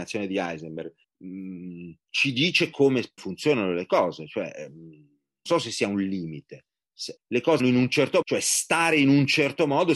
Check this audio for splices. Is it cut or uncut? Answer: cut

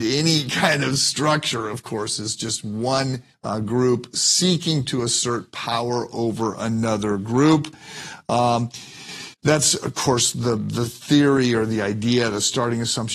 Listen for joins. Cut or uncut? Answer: cut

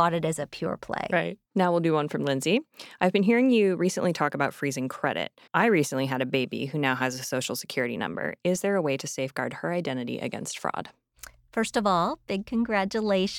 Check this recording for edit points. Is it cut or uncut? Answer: cut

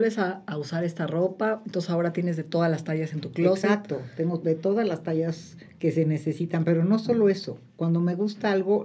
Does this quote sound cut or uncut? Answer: cut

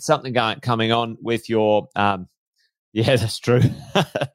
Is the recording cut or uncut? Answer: uncut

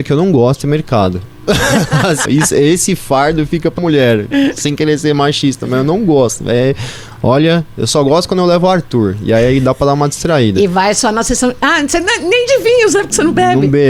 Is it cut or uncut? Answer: cut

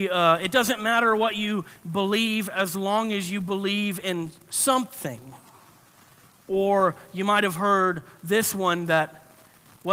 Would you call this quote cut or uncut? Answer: uncut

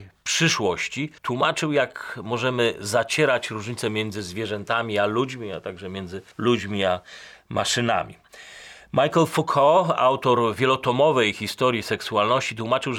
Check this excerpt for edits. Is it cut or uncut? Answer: cut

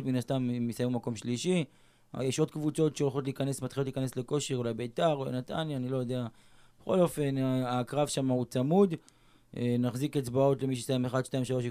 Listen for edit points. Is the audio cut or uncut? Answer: uncut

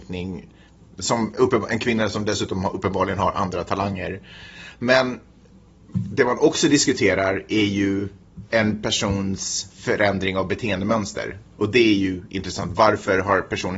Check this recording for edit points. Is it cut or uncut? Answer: uncut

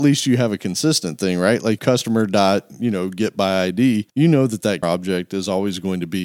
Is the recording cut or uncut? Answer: cut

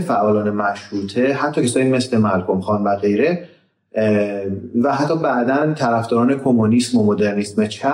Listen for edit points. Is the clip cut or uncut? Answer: uncut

